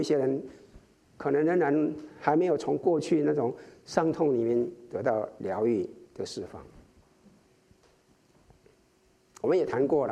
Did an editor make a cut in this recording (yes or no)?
no